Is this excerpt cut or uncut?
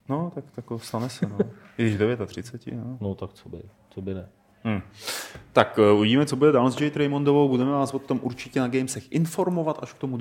uncut